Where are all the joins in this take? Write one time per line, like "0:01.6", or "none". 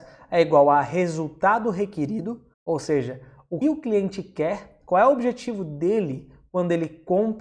0:02.5
0:03.6